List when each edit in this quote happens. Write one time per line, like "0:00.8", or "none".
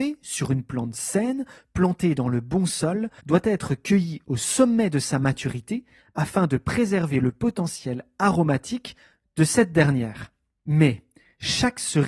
0:03.2